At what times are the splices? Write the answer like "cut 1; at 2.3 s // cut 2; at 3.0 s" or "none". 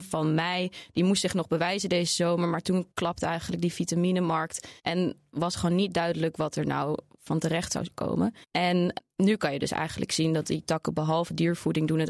cut 1; at 2.9 s // cut 2; at 4.8 s // cut 3; at 8.4 s